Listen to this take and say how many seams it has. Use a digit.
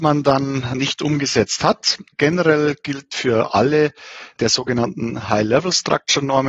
0